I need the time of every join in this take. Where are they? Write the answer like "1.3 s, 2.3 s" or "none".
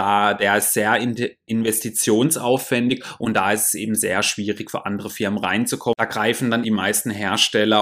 6.6 s